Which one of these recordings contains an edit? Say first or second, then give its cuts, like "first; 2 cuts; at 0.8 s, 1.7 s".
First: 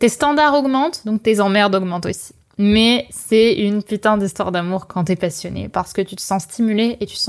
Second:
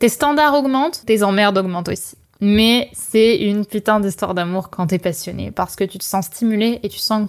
second; 1 cut; at 1.0 s